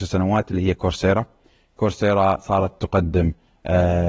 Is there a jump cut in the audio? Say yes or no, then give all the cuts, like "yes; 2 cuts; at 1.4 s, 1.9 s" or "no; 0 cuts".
no; 0 cuts